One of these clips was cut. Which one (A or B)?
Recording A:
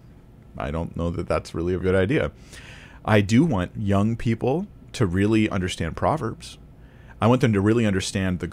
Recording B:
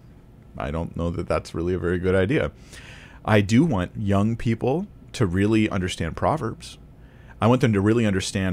A